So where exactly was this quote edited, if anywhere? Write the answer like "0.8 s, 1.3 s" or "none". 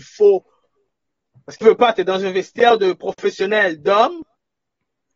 1.6 s